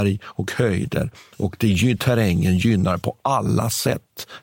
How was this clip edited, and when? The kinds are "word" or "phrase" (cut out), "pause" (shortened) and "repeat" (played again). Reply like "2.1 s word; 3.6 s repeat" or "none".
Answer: none